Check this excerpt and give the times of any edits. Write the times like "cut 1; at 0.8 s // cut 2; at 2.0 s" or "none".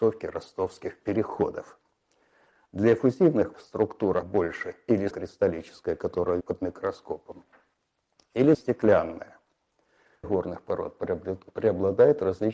cut 1; at 3.5 s // cut 2; at 4.2 s // cut 3; at 5.1 s // cut 4; at 6.4 s // cut 5; at 8.5 s // cut 6; at 10.2 s